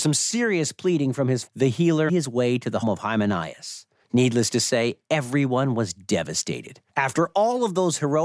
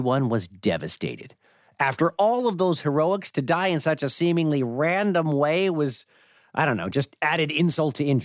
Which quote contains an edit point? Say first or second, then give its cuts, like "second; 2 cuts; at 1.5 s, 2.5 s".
first; 5 cuts; at 1.5 s, 2.1 s, 2.8 s, 4.0 s, 6.9 s